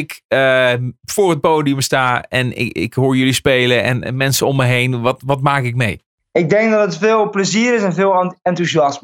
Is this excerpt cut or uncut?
uncut